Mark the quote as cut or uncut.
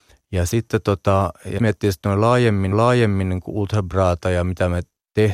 cut